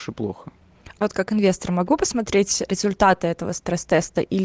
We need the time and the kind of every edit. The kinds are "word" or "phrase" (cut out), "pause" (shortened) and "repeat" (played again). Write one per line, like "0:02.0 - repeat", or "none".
0:01.0 - word
0:02.7 - word